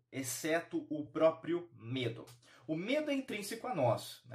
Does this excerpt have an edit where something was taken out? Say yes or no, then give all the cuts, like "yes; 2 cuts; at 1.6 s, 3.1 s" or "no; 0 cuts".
no; 0 cuts